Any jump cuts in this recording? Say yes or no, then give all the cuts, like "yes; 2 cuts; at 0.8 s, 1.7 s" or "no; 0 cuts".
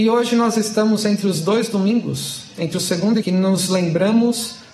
yes; 1 cut; at 3.2 s